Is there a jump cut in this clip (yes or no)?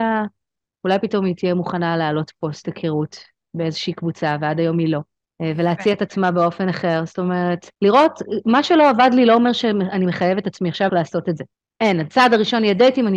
yes